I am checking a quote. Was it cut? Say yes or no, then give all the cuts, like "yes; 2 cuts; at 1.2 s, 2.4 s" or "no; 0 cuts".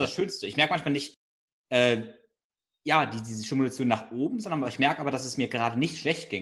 no; 0 cuts